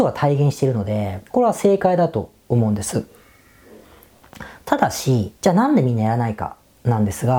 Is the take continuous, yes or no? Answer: no